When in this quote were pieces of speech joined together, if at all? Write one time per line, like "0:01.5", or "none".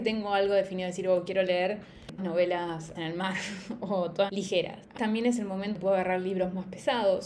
0:02.2
0:02.9
0:04.3
0:05.0
0:05.7

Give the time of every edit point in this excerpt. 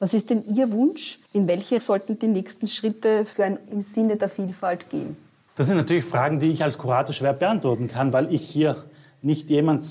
0:01.2
0:01.8
0:03.6
0:08.1

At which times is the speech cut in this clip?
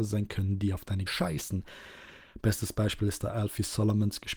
0:01.1

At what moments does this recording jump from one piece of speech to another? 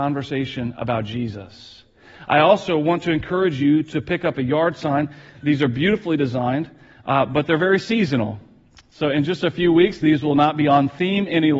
none

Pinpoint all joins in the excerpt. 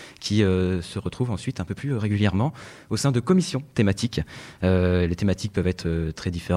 none

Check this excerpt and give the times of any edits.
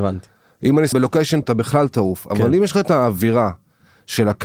0:00.9
0:01.4

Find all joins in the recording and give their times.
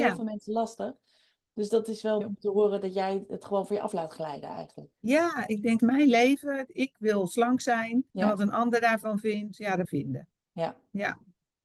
0:02.2
0:05.8
0:08.1
0:09.8

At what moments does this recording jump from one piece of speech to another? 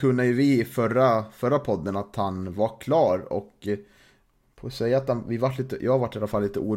none

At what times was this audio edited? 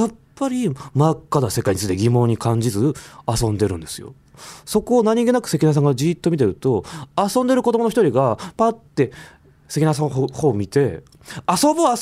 0:08.9

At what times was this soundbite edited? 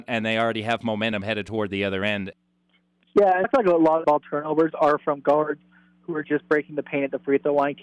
0:03.4
0:04.0

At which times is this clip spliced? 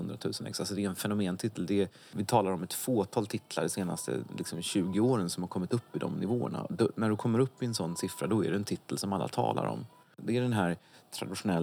none

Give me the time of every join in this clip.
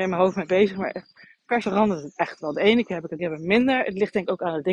0:01.6
0:03.2

